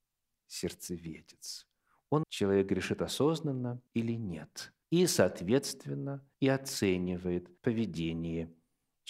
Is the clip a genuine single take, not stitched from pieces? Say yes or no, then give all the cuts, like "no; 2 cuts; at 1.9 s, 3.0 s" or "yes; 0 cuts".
no; 5 cuts; at 2.2 s, 3.9 s, 4.8 s, 6.3 s, 7.6 s